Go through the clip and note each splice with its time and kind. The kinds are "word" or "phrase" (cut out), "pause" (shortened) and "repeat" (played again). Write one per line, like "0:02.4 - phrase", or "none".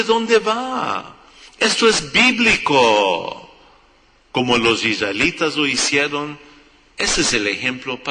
none